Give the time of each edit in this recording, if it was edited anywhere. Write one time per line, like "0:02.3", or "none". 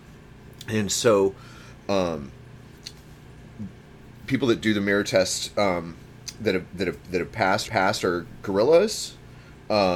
0:07.6